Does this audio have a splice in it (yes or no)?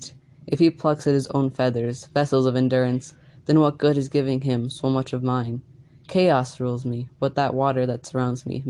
no